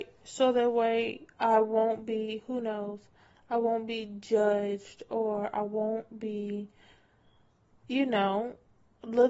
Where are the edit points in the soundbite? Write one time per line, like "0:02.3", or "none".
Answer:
none